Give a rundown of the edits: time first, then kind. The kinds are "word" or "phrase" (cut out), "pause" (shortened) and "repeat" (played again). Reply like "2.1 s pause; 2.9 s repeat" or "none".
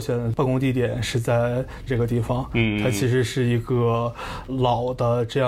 1.9 s word